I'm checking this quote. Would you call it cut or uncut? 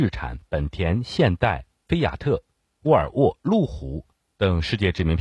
uncut